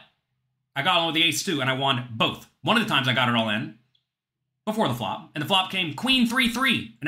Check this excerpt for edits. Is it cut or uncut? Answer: uncut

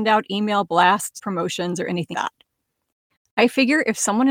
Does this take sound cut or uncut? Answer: cut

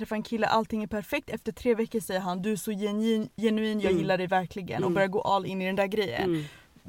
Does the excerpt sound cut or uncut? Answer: uncut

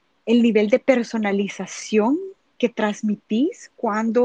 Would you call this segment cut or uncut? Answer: uncut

